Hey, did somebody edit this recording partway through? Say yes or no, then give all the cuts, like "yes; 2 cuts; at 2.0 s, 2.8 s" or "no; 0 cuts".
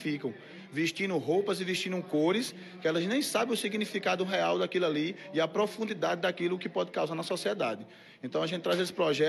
no; 0 cuts